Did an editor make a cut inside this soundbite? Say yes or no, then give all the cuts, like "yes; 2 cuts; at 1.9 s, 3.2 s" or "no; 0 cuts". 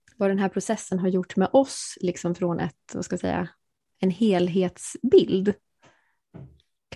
no; 0 cuts